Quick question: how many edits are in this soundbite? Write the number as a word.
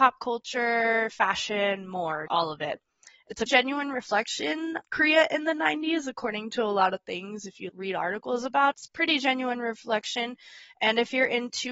five